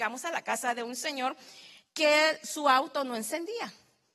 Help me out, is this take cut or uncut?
uncut